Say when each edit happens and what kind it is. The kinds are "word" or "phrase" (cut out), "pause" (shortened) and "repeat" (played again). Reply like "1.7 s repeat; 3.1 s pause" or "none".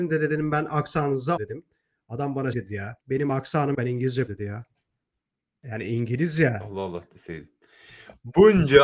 1.4 s word; 2.5 s word; 3.0 s pause; 3.7 s word; 4.3 s word; 5.2 s pause